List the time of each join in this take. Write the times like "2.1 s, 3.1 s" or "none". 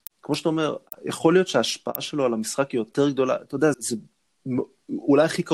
3.7 s